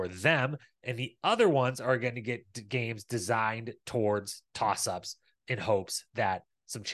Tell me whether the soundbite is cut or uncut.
uncut